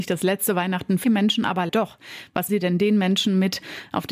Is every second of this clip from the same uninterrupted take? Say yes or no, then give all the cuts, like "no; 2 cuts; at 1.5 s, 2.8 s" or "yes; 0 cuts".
no; 3 cuts; at 1.0 s, 1.7 s, 2.5 s